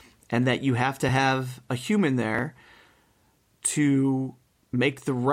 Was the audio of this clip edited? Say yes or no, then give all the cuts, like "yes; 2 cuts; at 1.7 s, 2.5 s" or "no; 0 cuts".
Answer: no; 0 cuts